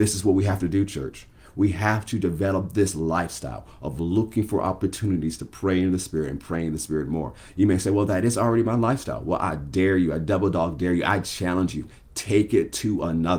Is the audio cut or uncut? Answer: uncut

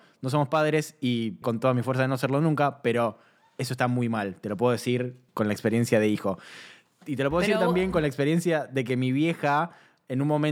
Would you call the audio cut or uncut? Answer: cut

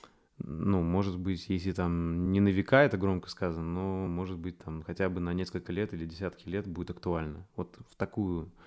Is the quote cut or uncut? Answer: uncut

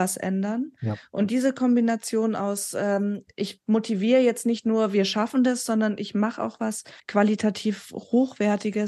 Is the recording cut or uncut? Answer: cut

